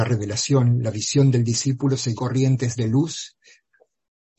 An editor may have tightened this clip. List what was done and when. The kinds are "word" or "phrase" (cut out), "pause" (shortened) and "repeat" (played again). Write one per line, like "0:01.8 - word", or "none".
0:02.2 - phrase